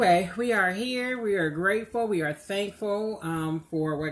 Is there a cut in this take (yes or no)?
no